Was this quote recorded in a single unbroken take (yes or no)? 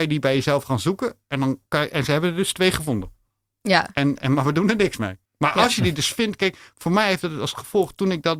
no